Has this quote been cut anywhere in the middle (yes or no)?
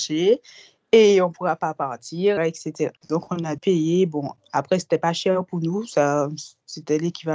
yes